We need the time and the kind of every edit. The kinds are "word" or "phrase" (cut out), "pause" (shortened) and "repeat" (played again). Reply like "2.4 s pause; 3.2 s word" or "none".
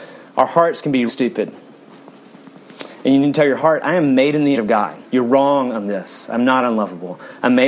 1.1 s word; 3.6 s word; 4.5 s word; 5.1 s pause